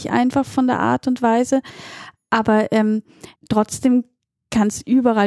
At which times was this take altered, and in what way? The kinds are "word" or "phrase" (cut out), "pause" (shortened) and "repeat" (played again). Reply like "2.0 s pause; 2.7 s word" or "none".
3.4 s pause